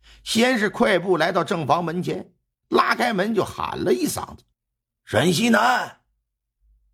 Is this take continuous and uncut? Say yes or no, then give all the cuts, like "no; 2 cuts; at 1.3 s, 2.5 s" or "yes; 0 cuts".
no; 1 cut; at 4.5 s